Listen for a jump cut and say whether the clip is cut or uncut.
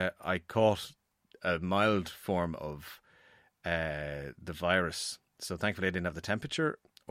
uncut